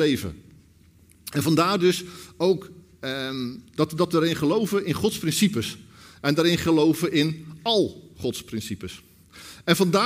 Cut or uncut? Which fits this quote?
uncut